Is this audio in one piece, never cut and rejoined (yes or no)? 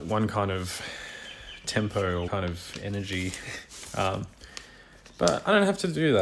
no